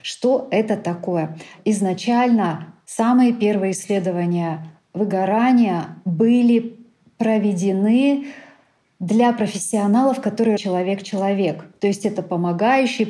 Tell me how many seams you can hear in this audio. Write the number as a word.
one